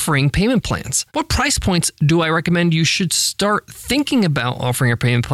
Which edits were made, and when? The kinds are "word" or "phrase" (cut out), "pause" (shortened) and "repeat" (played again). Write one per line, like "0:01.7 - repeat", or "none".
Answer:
0:01.1 - pause

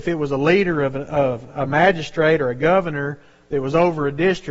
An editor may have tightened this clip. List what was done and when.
none

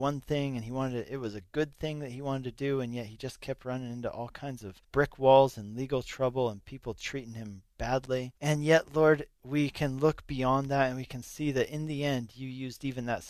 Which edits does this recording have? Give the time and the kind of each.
0:04.8 - pause
0:08.4 - pause

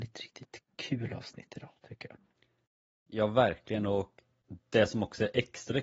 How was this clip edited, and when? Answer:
none

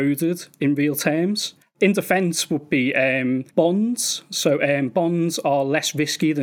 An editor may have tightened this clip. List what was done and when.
0:01.6 - pause
0:03.5 - pause

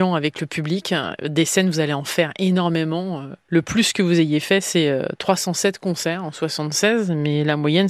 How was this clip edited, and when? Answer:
none

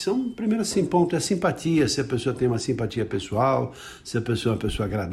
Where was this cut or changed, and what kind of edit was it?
none

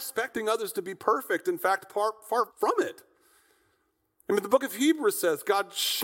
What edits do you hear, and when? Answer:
0:02.5 - pause

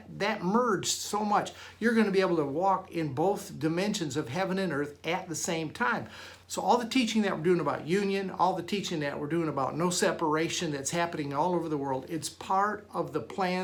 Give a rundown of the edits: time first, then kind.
0:06.4 - pause

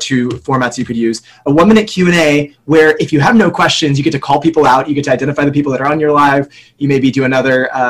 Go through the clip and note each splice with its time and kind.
none

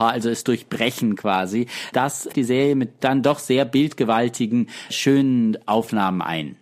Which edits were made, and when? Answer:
0:02.3 - word

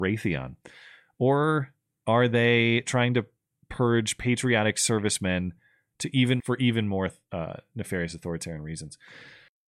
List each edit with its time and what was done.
0:06.4 - phrase

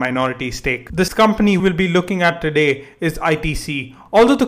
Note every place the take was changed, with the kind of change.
0:01.1 - word
0:01.6 - word

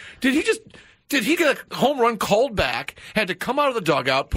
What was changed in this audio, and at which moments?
0:01.4 - word

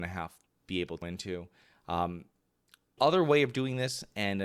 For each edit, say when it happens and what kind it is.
0:01.0 - word
0:03.0 - word

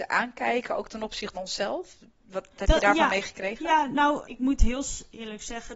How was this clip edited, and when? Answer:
0:01.3 - word
0:02.6 - word
0:04.2 - word

